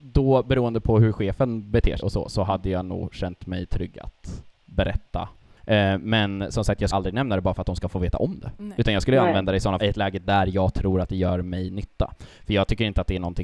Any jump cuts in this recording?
yes; 3 cuts; at 2.0 s, 6.9 s, 9.8 s

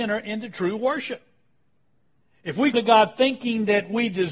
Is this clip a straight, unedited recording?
no; 2 cuts; at 2.0 s, 2.7 s

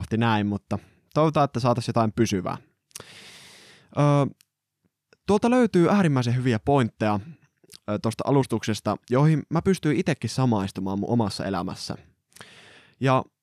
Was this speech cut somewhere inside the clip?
no; 0 cuts

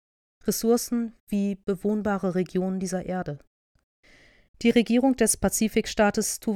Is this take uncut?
yes; 0 cuts

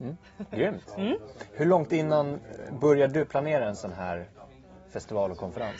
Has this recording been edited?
no; 0 cuts

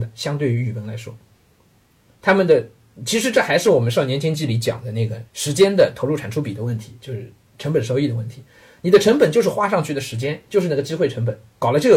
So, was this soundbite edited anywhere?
yes; 1 cut; at 5.3 s

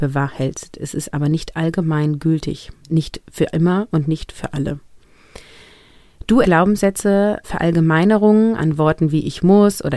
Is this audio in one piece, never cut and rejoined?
no; 4 cuts; at 2.8 s, 6.4 s, 7.4 s, 8.6 s

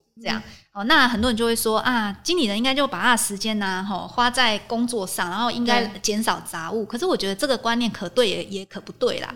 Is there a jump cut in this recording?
no; 0 cuts

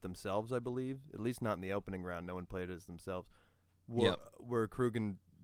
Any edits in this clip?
no; 0 cuts

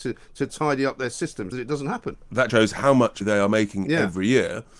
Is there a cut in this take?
yes; 3 cuts; at 1.5 s, 2.5 s, 3.2 s

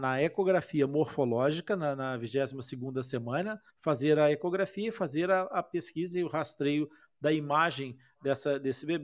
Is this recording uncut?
no; 1 cut; at 3.7 s

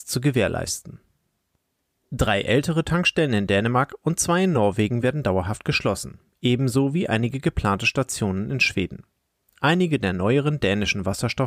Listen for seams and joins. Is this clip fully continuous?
yes; 0 cuts

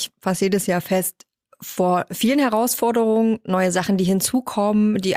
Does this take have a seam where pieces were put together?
no; 0 cuts

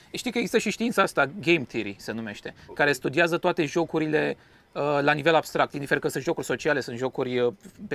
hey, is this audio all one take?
yes; 0 cuts

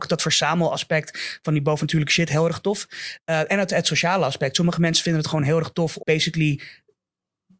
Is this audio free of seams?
no; 1 cut; at 6.0 s

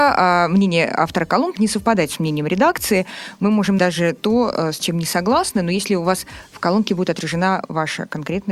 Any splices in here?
yes; 2 cuts; at 1.6 s, 3.8 s

